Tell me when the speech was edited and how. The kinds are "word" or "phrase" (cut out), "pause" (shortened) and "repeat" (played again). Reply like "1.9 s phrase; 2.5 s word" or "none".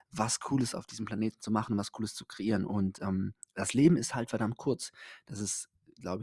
none